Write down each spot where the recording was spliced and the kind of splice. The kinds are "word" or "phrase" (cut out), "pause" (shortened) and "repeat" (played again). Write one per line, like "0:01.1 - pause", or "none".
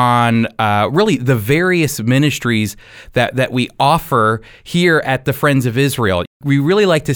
none